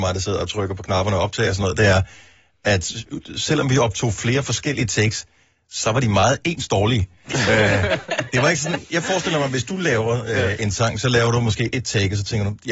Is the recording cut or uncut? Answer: uncut